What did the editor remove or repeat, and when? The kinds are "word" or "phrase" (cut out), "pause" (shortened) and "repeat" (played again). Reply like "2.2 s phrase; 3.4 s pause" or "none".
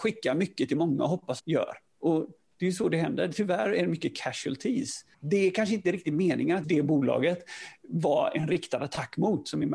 1.4 s phrase; 5.1 s pause; 6.6 s word